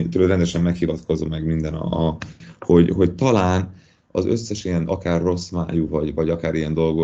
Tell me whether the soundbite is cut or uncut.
uncut